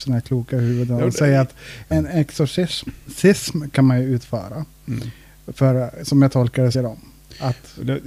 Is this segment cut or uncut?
cut